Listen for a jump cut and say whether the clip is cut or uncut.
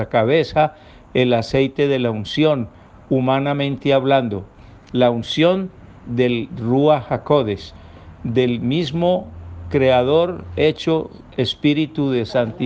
cut